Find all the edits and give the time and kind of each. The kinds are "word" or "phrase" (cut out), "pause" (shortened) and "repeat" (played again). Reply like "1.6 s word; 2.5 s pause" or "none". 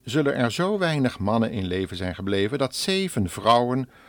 none